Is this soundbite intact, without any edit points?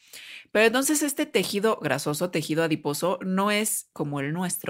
yes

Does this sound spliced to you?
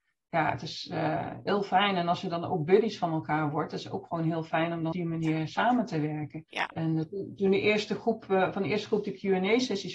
yes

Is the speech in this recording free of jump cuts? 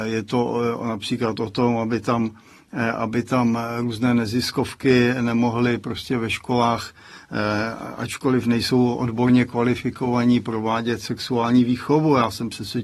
yes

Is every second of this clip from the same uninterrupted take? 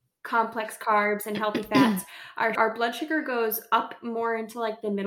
no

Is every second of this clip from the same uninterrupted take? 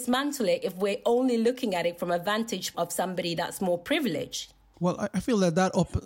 no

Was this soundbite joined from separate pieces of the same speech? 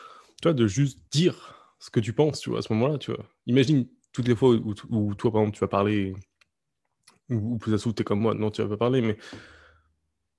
yes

